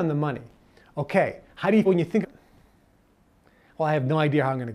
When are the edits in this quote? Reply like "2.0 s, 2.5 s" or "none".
1.9 s, 2.2 s